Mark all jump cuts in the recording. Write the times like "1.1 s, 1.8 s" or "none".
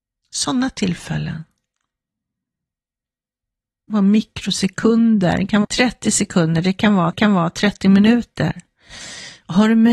3.9 s, 5.6 s, 7.1 s

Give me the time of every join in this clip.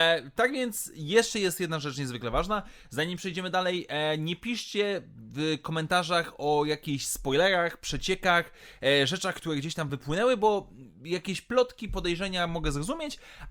none

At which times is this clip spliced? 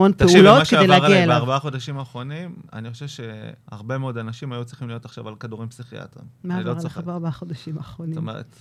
2.7 s, 3.6 s, 6.3 s

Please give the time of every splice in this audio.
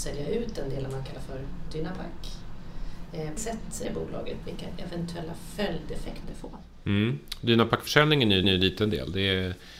3.4 s, 3.8 s, 4.4 s, 6.2 s, 8.4 s

